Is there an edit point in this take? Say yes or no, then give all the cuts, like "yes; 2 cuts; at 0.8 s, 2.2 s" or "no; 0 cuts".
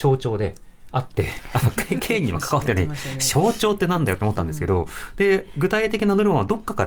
no; 0 cuts